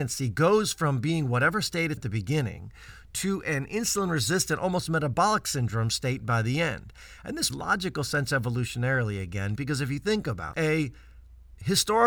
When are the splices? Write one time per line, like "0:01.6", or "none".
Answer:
0:02.0
0:07.5
0:10.5